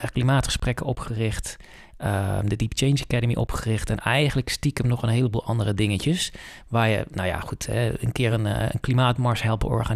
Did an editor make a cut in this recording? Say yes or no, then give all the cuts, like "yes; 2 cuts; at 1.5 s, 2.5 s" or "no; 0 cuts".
no; 0 cuts